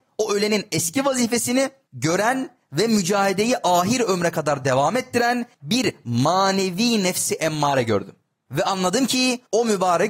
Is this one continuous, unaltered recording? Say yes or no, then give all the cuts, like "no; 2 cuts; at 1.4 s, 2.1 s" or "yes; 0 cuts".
yes; 0 cuts